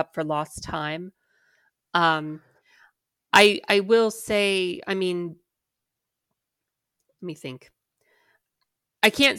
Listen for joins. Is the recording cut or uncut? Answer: uncut